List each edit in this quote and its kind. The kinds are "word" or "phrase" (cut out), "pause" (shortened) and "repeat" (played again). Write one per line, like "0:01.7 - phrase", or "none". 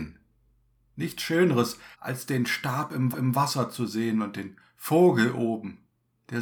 0:01.9 - pause
0:03.1 - repeat